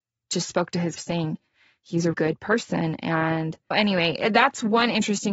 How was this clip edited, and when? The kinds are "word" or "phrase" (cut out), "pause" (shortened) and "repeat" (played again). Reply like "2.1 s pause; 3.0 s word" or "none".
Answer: 1.0 s word; 2.1 s word; 3.7 s word